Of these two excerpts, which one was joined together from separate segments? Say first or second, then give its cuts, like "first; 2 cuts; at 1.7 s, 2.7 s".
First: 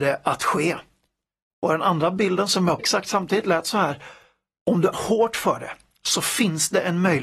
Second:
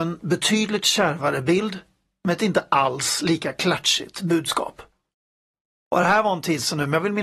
first; 2 cuts; at 2.8 s, 4.9 s